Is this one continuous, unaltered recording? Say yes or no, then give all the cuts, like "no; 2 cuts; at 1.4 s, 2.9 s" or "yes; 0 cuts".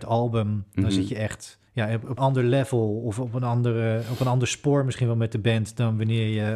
no; 2 cuts; at 1.7 s, 2.2 s